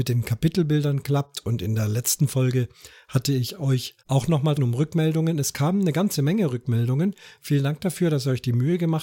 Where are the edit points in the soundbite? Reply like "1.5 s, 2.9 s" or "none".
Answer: 4.0 s, 4.6 s

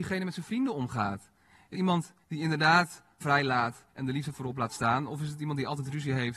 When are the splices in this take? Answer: 1.7 s, 2.2 s, 3.2 s, 3.9 s

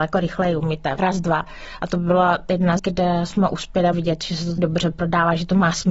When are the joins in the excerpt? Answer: 1.0 s, 2.8 s, 3.9 s, 4.6 s

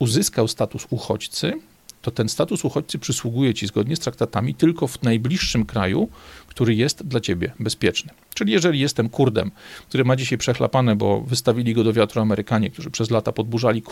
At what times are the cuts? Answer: none

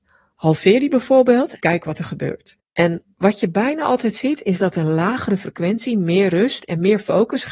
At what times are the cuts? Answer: 1.6 s, 2.6 s

